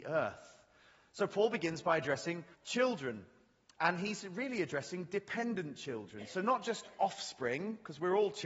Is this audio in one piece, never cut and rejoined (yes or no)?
no